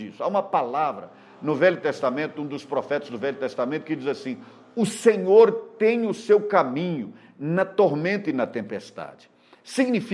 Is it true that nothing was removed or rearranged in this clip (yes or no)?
yes